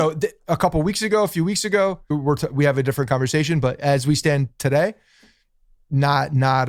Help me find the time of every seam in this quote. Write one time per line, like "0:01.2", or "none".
0:02.1